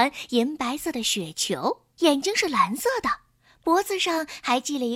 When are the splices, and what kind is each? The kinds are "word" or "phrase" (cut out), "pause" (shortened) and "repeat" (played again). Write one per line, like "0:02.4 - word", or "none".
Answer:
0:01.9 - pause

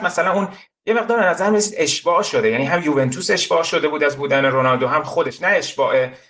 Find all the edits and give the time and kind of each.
none

